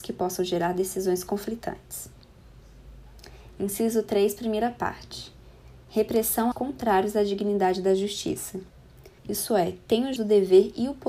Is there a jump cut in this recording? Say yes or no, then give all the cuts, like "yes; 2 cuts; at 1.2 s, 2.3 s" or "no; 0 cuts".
yes; 3 cuts; at 6.5 s, 9.2 s, 10.2 s